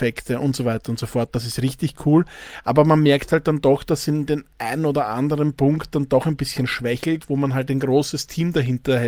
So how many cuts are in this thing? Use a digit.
0